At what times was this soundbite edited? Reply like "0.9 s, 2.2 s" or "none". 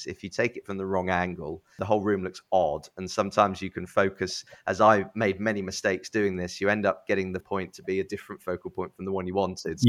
7.4 s